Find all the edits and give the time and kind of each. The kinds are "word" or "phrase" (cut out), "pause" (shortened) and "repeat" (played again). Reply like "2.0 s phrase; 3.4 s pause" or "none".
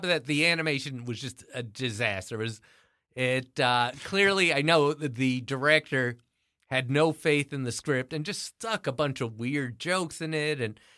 none